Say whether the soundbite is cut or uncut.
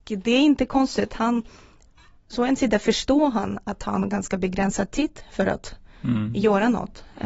uncut